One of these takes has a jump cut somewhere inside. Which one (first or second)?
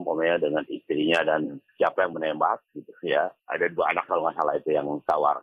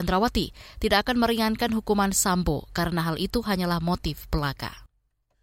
first